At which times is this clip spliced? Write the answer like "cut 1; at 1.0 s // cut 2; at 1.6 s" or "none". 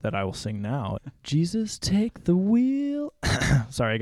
cut 1; at 1.0 s